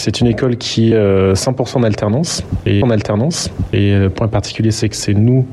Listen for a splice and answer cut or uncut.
cut